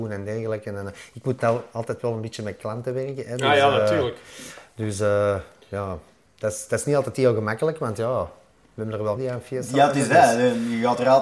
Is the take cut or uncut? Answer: cut